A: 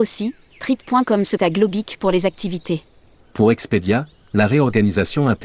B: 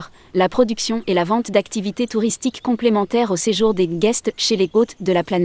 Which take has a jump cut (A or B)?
A